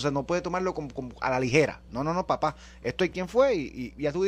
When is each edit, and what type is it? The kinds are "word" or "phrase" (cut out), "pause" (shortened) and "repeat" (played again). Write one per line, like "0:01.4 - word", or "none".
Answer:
0:03.1 - phrase